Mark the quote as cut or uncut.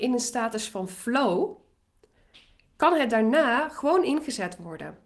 uncut